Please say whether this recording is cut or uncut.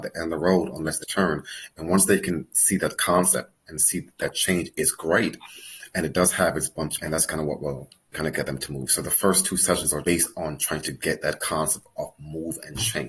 cut